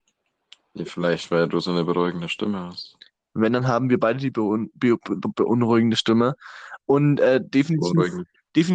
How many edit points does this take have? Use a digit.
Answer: 0